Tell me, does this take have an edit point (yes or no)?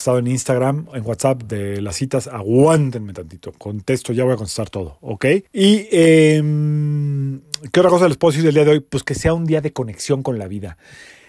yes